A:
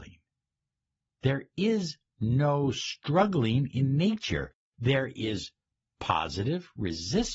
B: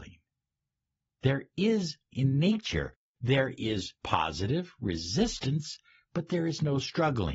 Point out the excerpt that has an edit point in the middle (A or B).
B